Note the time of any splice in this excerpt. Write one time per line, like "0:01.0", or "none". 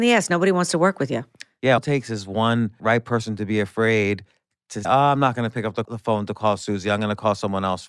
0:01.8
0:02.8
0:04.8
0:05.8